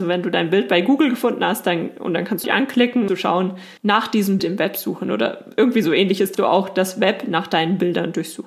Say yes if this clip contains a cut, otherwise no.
yes